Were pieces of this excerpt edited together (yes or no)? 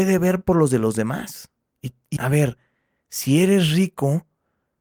yes